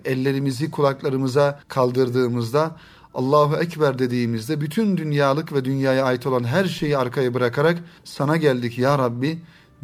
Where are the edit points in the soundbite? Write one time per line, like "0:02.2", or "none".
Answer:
0:01.6
0:08.0